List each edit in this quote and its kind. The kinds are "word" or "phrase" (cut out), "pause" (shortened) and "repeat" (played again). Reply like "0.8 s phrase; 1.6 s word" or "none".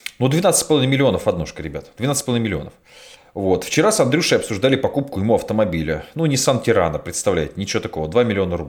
none